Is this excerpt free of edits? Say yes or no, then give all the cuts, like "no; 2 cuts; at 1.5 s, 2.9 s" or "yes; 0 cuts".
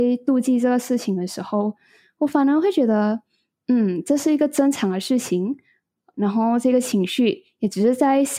yes; 0 cuts